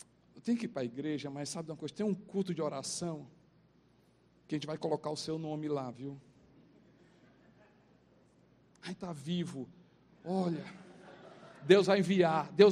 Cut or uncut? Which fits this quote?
uncut